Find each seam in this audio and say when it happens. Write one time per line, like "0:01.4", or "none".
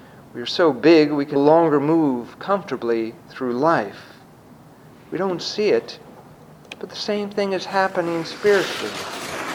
0:01.4